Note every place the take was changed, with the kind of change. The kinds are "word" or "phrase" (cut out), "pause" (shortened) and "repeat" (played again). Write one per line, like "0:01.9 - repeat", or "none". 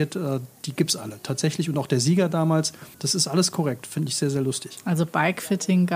0:02.9 - pause